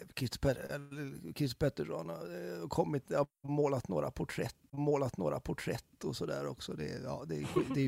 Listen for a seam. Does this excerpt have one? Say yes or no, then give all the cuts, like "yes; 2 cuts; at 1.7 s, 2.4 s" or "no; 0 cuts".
yes; 1 cut; at 4.7 s